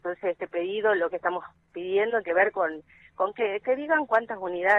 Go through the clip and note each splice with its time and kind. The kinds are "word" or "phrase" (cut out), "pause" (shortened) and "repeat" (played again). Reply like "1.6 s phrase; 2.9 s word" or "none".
1.1 s phrase; 2.2 s word; 3.6 s word